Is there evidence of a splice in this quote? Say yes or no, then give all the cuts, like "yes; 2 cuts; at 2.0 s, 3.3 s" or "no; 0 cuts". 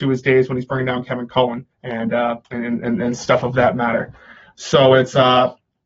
yes; 2 cuts; at 1.7 s, 2.4 s